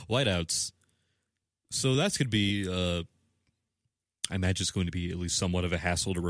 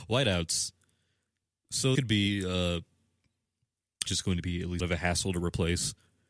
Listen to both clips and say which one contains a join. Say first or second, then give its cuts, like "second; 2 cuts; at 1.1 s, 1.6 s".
second; 3 cuts; at 1.9 s, 4.1 s, 4.8 s